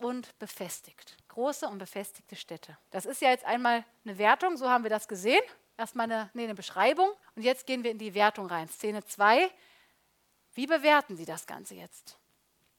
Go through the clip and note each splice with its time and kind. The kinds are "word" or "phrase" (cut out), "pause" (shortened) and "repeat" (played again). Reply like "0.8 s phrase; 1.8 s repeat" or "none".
1.2 s pause; 2.8 s pause; 7.2 s pause